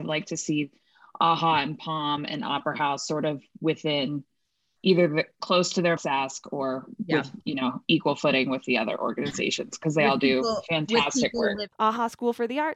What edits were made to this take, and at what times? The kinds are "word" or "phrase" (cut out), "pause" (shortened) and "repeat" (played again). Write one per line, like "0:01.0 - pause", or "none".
0:06.0 - word